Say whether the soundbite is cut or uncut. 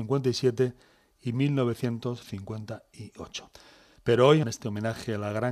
cut